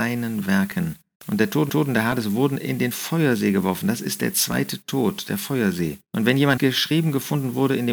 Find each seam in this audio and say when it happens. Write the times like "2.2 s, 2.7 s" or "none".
1.1 s, 1.7 s, 6.0 s, 6.6 s